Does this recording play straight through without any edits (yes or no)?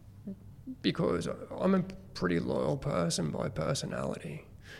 yes